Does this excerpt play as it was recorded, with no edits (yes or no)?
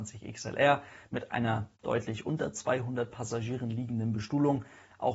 yes